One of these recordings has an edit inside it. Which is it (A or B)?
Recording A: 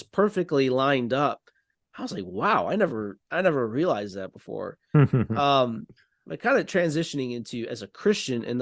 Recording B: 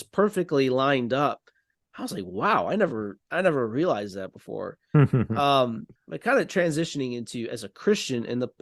B